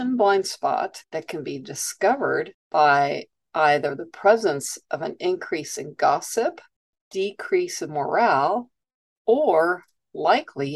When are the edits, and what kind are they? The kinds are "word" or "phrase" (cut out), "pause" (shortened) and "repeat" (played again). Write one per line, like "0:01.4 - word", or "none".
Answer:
none